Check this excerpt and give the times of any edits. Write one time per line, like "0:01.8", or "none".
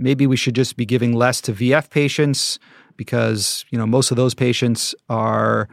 none